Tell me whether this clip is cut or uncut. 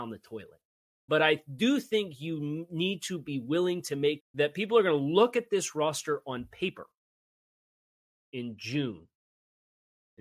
cut